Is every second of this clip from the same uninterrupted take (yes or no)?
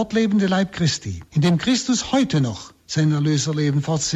no